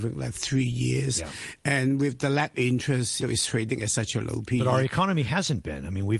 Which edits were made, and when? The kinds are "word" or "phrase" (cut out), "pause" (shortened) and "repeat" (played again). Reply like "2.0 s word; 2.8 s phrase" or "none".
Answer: 2.5 s word; 3.2 s word